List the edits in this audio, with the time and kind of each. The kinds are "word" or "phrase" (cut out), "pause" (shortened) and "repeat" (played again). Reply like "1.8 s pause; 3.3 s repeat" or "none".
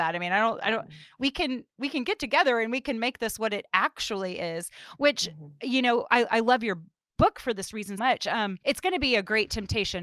8.0 s word; 8.6 s pause